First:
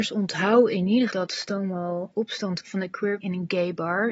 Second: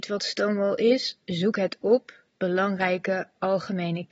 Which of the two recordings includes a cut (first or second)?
first